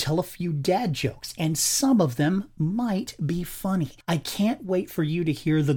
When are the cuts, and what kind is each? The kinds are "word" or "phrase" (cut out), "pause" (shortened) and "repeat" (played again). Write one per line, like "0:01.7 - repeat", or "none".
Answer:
0:04.0 - pause